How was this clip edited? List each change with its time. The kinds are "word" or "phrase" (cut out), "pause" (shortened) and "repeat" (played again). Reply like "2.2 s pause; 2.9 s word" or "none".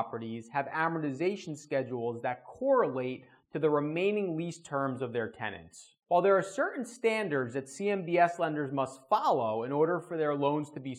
6.0 s pause